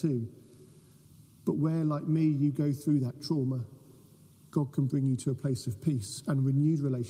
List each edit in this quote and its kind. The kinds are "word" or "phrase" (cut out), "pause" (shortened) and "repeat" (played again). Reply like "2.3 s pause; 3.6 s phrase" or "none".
none